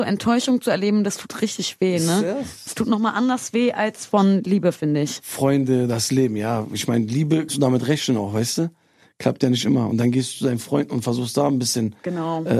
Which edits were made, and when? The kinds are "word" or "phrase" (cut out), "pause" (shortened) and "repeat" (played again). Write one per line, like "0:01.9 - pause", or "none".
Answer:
0:07.5 - word